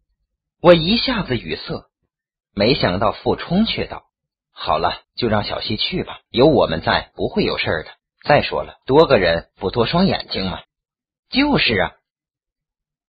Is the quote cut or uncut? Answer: cut